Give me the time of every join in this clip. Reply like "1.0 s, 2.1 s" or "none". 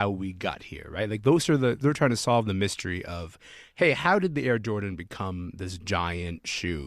1.8 s